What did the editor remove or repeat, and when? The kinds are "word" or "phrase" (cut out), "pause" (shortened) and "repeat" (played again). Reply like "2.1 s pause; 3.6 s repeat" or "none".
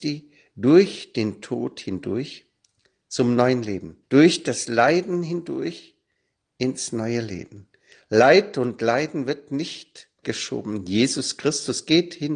4.0 s pause; 10.2 s word